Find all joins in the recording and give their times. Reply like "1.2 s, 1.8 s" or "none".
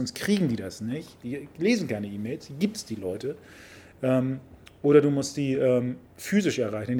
none